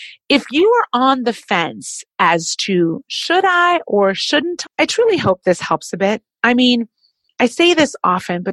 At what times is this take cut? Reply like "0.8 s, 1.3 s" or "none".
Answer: 4.6 s